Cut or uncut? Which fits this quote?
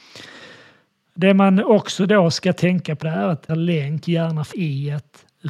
cut